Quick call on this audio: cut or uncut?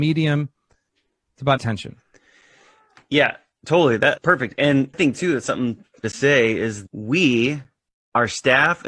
cut